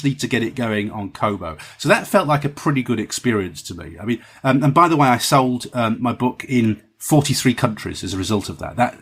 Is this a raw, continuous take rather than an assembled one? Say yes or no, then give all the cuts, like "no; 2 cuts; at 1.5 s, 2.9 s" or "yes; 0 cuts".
yes; 0 cuts